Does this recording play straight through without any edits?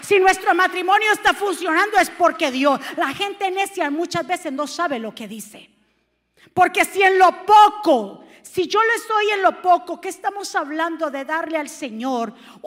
yes; 0 cuts

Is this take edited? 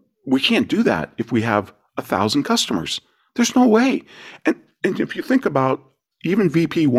no; 0 cuts

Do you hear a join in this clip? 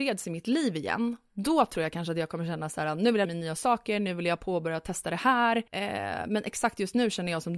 yes; 2 cuts; at 3.2 s, 5.7 s

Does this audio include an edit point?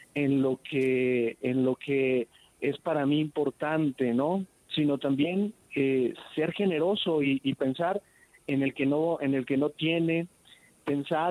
no; 0 cuts

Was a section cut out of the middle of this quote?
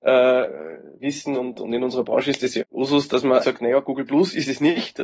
yes; 2 cuts; at 2.6 s, 3.4 s

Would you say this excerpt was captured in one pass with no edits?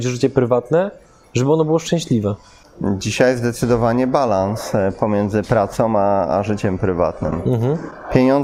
yes; 0 cuts

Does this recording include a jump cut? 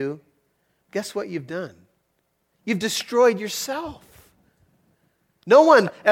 no; 0 cuts

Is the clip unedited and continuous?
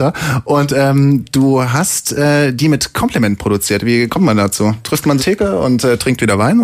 no; 1 cut; at 5.2 s

